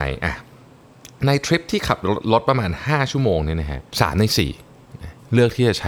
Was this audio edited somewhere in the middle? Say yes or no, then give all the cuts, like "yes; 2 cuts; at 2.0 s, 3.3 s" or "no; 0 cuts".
yes; 1 cut; at 3.9 s